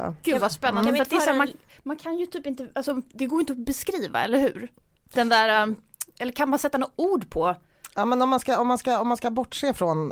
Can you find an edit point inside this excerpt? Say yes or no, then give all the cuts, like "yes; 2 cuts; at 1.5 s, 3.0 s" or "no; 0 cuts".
no; 0 cuts